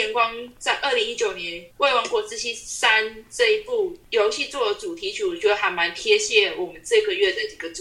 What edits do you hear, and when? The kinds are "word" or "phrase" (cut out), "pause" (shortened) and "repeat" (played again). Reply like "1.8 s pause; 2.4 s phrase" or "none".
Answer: 1.7 s pause

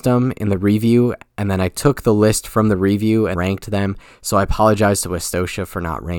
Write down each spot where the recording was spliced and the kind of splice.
3.3 s word

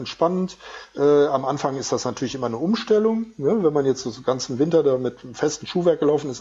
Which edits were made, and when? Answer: none

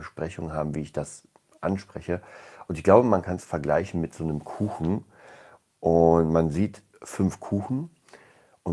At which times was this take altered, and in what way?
none

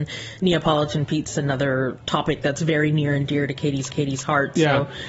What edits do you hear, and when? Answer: 1.3 s phrase; 3.9 s repeat

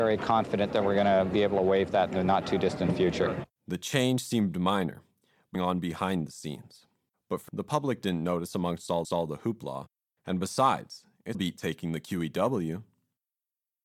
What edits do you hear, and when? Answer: 3.6 s pause; 5.5 s phrase; 7.1 s pause; 7.5 s word; 9.0 s repeat; 11.3 s word

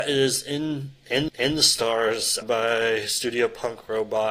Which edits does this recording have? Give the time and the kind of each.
1.3 s repeat; 2.4 s word

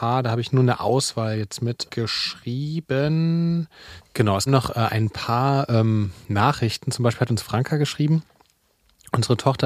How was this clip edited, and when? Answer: 1.9 s word; 4.5 s word

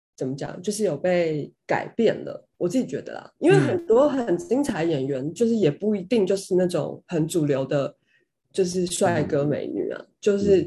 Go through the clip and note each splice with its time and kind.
1.5 s pause; 2.5 s pause; 3.4 s pause

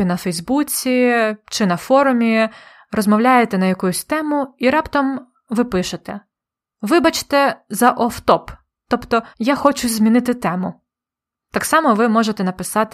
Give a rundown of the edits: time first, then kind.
9.3 s pause

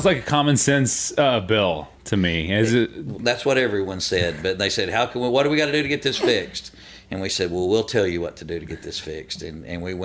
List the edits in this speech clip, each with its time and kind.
2.0 s pause

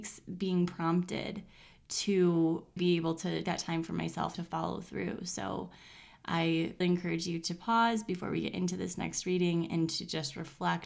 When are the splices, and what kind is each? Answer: 2.8 s word; 3.4 s word; 4.3 s word; 6.8 s word

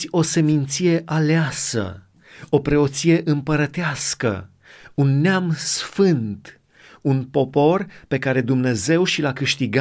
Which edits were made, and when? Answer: none

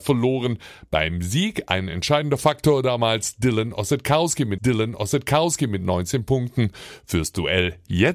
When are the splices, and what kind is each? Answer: 4.6 s repeat

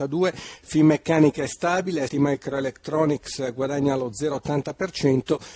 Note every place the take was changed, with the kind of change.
2.1 s word

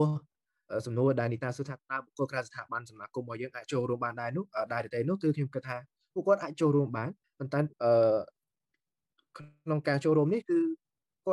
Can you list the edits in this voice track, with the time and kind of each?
7.2 s pause; 7.7 s pause

